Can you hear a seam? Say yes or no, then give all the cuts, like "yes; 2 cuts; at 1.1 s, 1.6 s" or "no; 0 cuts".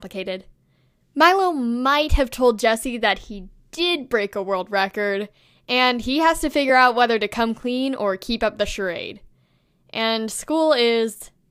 no; 0 cuts